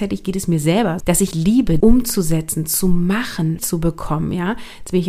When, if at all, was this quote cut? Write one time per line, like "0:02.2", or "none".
0:01.0
0:01.3
0:01.8
0:03.6